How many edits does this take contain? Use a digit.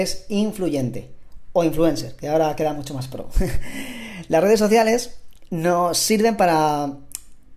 0